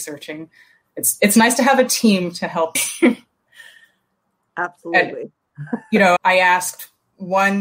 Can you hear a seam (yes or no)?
yes